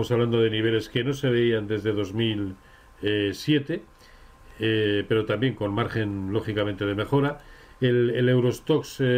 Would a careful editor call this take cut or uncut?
uncut